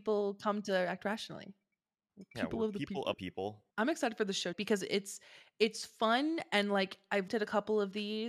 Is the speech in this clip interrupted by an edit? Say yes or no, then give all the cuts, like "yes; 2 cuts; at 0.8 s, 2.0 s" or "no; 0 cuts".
yes; 4 cuts; at 3.1 s, 3.7 s, 4.5 s, 7.3 s